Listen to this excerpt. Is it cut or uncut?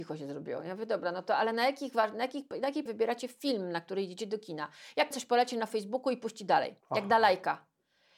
cut